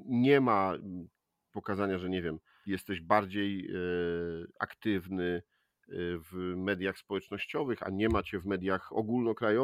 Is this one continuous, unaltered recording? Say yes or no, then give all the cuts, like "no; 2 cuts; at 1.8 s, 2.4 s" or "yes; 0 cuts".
no; 2 cuts; at 1.5 s, 2.7 s